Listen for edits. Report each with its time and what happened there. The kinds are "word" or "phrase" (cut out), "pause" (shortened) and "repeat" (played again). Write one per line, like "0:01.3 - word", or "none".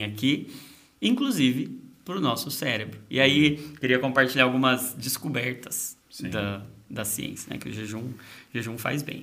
0:06.0 - pause